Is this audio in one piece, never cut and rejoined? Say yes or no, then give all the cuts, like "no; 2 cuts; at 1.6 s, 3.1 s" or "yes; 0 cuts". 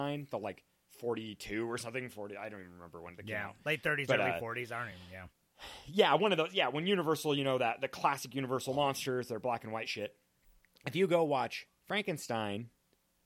yes; 0 cuts